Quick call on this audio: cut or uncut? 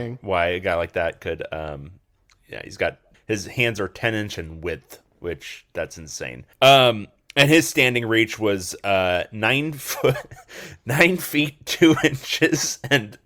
cut